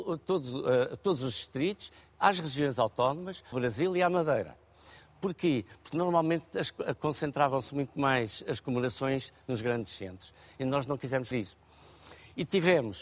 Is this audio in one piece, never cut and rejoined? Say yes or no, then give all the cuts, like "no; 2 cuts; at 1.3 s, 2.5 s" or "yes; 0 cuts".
no; 2 cuts; at 3.5 s, 11.3 s